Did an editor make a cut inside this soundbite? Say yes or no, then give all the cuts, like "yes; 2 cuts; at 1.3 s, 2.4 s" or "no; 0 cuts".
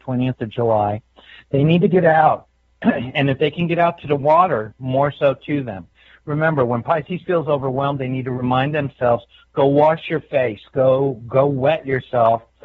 no; 0 cuts